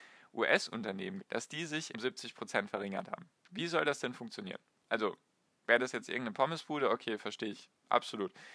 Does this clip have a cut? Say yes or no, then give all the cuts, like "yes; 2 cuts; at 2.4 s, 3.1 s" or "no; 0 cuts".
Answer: yes; 2 cuts; at 1.2 s, 1.9 s